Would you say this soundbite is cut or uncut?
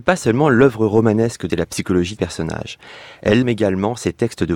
cut